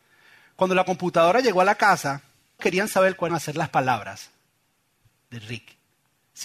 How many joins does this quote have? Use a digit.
3